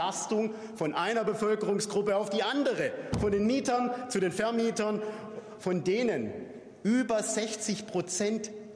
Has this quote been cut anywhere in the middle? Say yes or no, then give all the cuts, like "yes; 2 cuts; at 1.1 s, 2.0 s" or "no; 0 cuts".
no; 0 cuts